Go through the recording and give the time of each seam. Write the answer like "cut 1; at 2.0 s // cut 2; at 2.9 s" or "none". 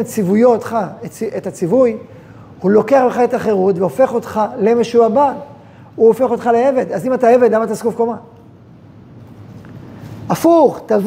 none